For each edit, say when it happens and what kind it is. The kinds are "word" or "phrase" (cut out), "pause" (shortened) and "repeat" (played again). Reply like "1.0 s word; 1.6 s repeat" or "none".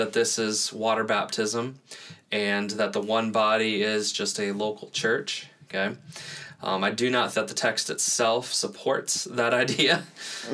7.3 s word